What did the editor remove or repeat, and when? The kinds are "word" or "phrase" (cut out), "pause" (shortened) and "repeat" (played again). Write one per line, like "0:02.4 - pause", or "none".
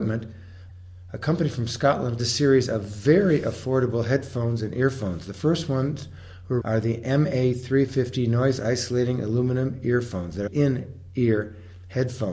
0:02.2 - phrase
0:06.6 - word
0:10.5 - word